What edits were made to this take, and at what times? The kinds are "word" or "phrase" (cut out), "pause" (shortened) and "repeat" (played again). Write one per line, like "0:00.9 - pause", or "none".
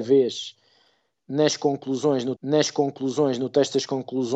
0:02.4 - repeat